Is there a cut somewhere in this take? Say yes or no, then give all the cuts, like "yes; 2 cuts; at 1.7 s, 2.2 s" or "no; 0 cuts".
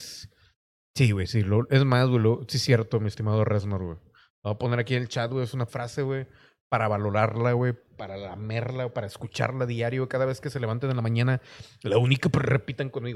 yes; 1 cut; at 5.7 s